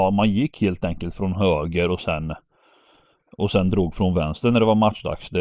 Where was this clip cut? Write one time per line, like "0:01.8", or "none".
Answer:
none